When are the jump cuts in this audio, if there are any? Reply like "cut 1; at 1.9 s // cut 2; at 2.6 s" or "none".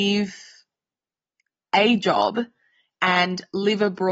none

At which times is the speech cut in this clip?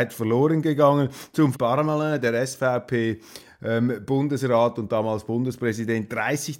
cut 1; at 1.5 s

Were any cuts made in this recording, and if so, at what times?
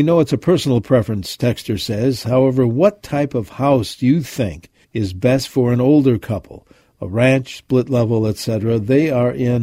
cut 1; at 4.8 s

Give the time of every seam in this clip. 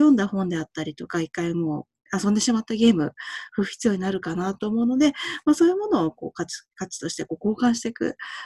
none

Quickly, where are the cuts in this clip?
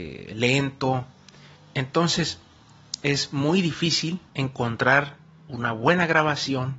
cut 1; at 1.5 s // cut 2; at 4.3 s

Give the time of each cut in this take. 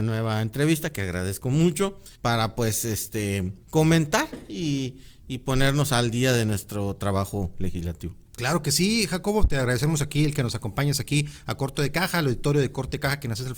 cut 1; at 2.1 s // cut 2; at 3.6 s

